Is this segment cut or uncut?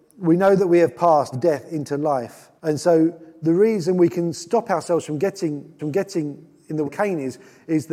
cut